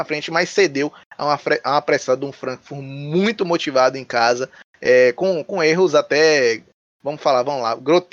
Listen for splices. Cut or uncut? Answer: uncut